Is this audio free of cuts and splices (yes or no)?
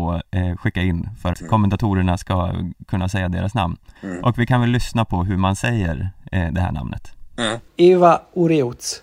no